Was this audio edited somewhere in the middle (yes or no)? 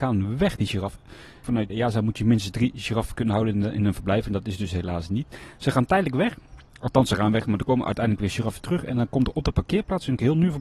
yes